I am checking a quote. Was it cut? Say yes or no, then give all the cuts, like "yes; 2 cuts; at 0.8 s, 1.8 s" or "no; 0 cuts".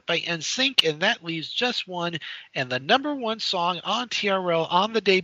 no; 0 cuts